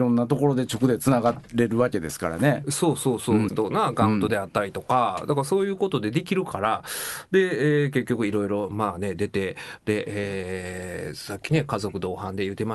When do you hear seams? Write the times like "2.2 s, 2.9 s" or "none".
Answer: 3.5 s